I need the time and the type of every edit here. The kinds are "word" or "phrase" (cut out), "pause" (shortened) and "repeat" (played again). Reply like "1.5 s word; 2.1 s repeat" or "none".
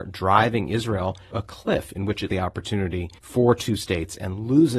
1.3 s word; 2.3 s word; 3.2 s pause